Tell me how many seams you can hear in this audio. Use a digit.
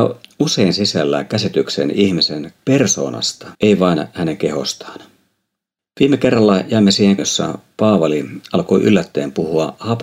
3